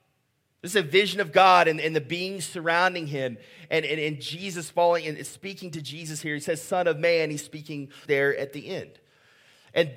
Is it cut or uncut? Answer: cut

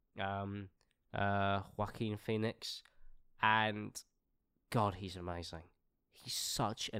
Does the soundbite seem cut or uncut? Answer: uncut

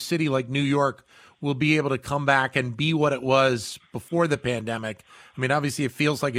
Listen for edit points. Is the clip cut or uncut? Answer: uncut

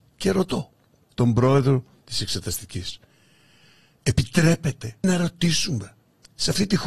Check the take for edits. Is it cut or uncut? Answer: cut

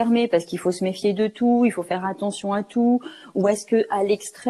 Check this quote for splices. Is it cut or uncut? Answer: uncut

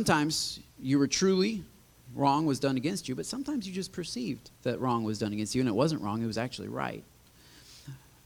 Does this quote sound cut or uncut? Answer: cut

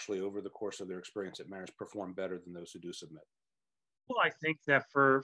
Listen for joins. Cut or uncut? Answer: uncut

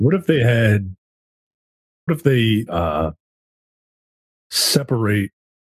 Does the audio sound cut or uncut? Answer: cut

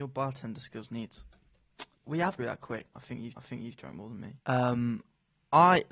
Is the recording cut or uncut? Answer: cut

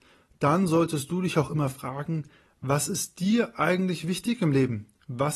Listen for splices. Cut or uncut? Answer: uncut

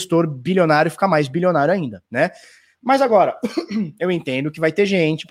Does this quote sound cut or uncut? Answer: cut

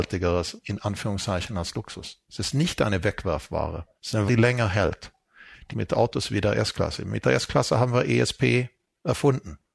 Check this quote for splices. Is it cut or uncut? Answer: cut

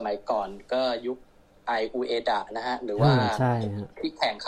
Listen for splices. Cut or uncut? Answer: uncut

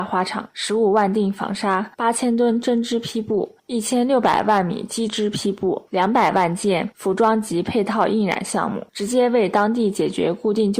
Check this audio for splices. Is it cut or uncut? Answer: cut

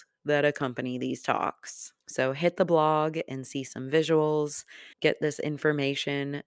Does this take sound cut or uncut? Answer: cut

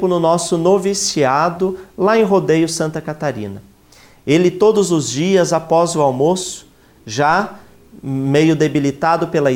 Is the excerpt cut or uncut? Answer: uncut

